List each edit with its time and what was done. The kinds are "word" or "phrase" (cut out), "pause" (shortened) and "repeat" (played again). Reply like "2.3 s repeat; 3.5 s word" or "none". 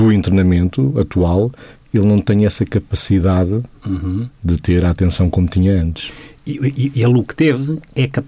none